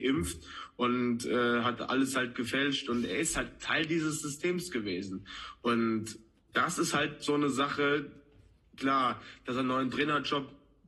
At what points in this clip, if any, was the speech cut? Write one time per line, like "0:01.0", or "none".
none